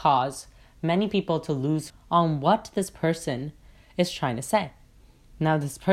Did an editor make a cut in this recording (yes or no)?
yes